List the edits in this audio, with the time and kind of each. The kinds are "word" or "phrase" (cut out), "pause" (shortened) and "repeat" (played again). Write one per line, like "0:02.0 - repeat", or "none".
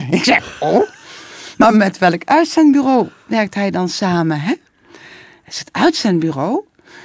none